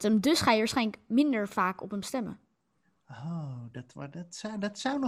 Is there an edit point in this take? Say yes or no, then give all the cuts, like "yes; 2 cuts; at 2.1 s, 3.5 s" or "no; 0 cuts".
no; 0 cuts